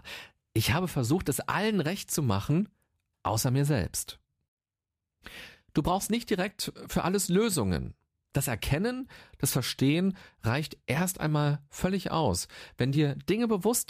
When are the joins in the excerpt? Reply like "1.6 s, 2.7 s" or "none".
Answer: none